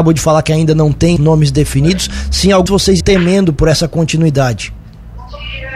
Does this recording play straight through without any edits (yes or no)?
no